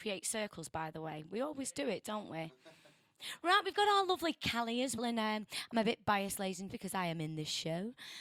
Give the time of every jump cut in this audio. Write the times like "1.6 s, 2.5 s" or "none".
5.0 s, 6.7 s